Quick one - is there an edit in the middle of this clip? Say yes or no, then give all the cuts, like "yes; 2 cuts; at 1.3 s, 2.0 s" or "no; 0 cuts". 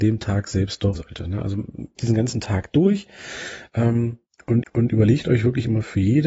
yes; 3 cuts; at 0.9 s, 2.0 s, 4.6 s